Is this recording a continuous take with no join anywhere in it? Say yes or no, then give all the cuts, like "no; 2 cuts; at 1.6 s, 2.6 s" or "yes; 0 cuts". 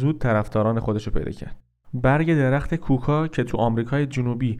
yes; 0 cuts